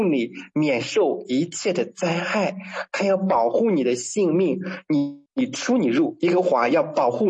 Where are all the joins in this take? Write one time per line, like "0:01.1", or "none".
0:05.3